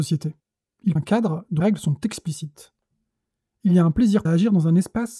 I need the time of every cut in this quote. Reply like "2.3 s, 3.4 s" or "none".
1.0 s, 1.6 s, 4.3 s

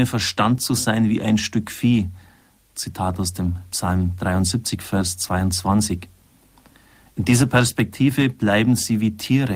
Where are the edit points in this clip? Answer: none

